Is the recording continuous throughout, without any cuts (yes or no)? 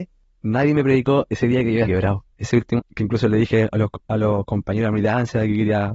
no